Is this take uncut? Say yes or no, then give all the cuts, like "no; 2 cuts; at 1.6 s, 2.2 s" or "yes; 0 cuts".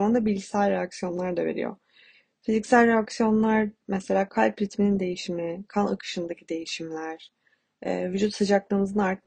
yes; 0 cuts